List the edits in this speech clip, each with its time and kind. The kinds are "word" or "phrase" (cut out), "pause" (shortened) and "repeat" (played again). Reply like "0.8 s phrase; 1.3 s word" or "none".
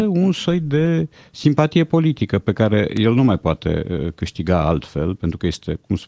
none